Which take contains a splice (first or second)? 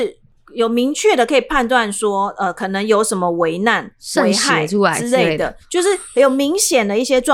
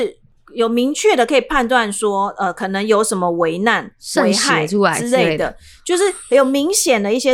first